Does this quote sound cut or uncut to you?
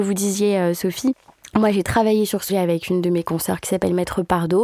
cut